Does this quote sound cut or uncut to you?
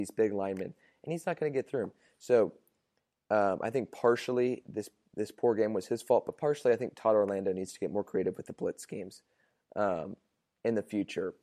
uncut